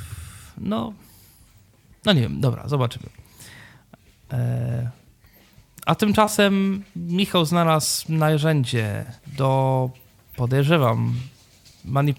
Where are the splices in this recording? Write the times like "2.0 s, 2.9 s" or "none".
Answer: 9.2 s